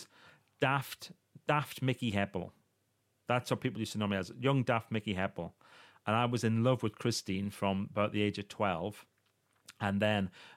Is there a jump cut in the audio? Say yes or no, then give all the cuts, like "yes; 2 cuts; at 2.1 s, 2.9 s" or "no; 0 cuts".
no; 0 cuts